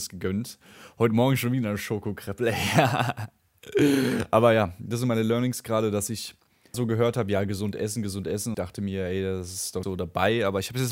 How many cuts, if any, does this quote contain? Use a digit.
3